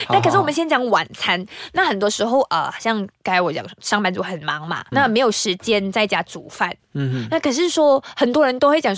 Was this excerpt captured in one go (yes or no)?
no